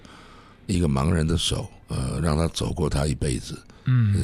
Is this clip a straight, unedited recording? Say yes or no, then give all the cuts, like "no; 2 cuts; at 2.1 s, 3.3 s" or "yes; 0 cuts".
no; 1 cut; at 1.8 s